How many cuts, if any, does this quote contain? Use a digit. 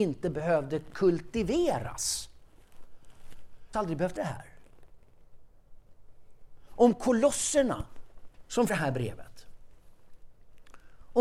3